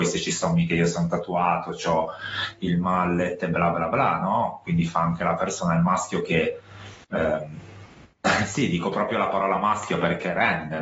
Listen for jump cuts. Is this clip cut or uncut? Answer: cut